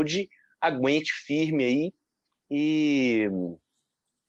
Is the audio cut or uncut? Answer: uncut